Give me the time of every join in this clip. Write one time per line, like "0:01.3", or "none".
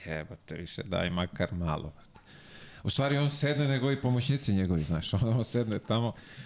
none